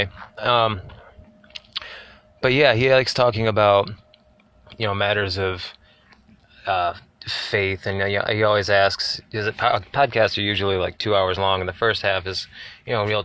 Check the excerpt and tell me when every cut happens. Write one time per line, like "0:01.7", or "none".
none

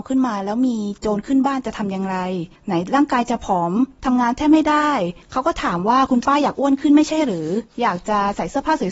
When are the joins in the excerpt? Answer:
0:02.6
0:05.2

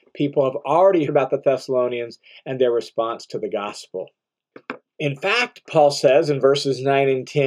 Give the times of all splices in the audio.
0:01.1

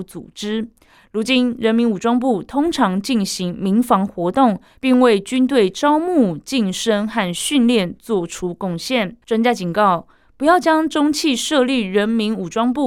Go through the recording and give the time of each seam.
0:09.2

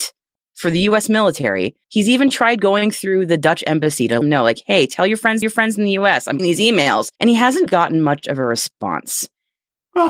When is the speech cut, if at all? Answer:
0:01.8
0:04.2
0:05.4
0:06.4
0:07.2
0:07.7

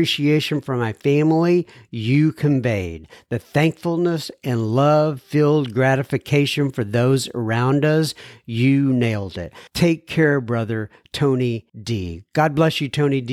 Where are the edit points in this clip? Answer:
0:09.7
0:11.7

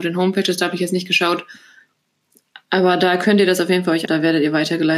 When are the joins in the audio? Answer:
0:04.1

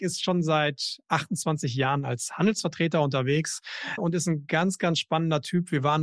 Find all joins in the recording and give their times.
0:04.0

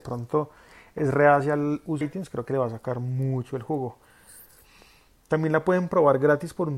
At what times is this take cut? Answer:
0:02.0

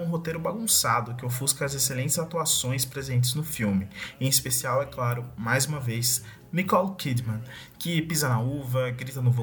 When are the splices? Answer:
none

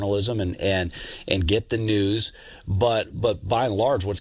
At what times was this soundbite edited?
0:01.5

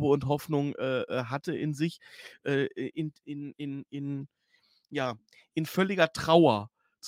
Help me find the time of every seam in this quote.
none

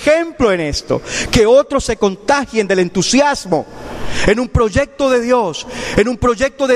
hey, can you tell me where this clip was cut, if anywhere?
none

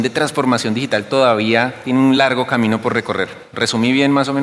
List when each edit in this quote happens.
none

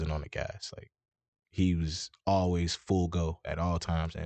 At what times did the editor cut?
none

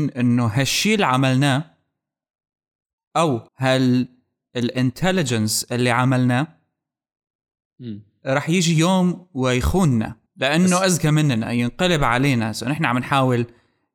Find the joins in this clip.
0:03.5
0:10.3

